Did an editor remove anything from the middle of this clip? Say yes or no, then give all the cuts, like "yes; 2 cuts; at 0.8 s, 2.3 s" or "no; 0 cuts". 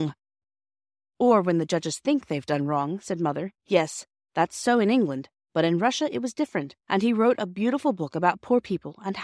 yes; 2 cuts; at 3.6 s, 6.8 s